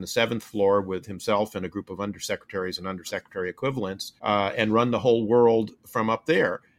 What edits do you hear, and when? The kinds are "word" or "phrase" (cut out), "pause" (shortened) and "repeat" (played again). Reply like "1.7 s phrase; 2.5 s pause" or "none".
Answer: 4.2 s pause